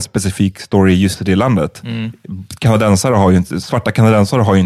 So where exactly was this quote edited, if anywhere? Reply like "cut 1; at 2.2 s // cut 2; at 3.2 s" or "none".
none